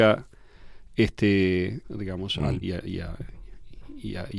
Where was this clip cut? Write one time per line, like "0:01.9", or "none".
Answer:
0:01.8
0:02.6